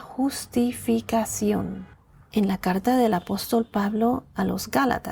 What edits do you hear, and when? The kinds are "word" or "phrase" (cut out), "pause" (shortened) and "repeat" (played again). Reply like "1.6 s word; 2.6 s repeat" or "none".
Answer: none